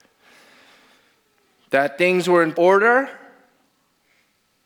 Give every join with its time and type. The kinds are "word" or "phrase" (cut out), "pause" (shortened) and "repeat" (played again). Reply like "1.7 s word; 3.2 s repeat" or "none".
2.5 s word